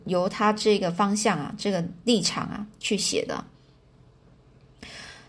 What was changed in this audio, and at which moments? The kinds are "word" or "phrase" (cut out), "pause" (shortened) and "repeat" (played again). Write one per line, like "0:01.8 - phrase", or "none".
none

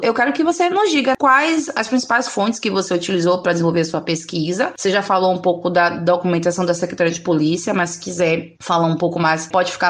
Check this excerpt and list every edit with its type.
none

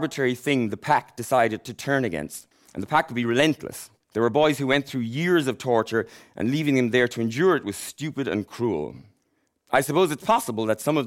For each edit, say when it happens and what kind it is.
none

